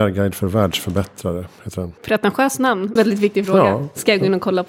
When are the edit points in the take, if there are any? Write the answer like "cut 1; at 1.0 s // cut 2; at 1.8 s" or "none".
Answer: cut 1; at 2.0 s // cut 2; at 3.0 s

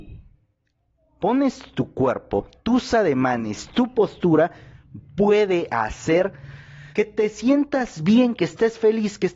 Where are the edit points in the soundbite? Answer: cut 1; at 6.9 s

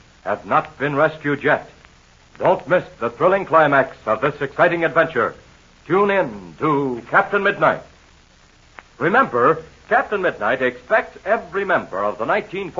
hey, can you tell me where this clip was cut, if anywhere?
none

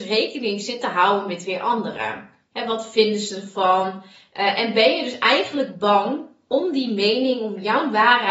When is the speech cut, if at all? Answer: none

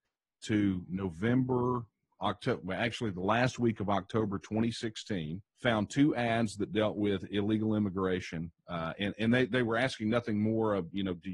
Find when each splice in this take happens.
cut 1; at 5.5 s

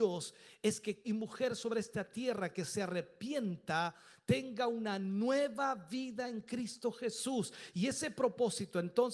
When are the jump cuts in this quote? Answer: cut 1; at 1.0 s

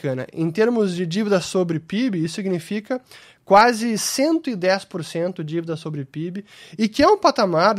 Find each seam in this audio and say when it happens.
none

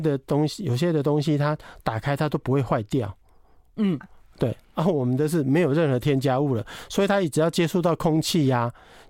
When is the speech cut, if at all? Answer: cut 1; at 4.0 s

